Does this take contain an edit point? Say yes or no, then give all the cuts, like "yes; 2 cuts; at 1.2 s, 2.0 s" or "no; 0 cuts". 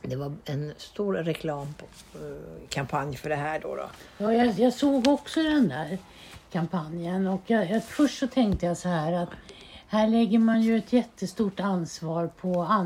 no; 0 cuts